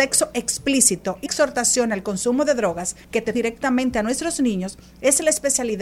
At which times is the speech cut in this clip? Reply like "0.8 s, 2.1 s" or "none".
1.3 s, 3.0 s, 3.3 s